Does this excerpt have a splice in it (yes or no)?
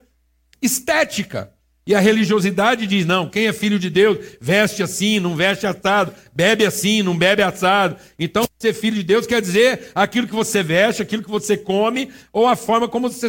no